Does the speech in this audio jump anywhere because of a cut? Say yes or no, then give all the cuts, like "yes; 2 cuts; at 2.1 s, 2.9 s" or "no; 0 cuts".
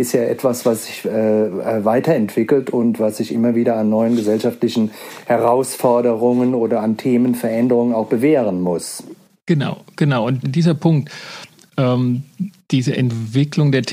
yes; 1 cut; at 10.4 s